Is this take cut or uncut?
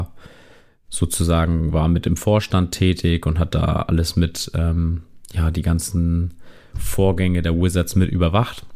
uncut